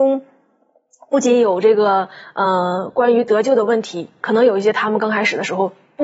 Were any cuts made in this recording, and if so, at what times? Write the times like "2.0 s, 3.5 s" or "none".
none